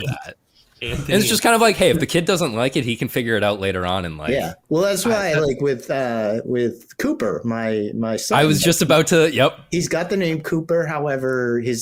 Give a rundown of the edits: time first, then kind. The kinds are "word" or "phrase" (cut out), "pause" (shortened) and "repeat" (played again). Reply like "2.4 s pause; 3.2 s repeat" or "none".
4.6 s pause